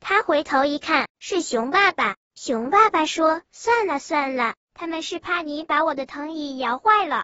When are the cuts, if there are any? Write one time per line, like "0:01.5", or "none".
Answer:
0:01.1
0:02.2